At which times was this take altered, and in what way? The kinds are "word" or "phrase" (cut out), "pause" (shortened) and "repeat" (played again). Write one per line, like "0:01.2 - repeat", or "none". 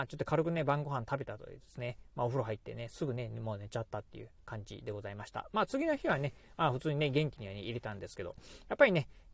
none